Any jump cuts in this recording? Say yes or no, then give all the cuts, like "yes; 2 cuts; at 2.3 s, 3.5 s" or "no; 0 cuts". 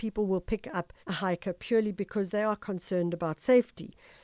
yes; 1 cut; at 1.0 s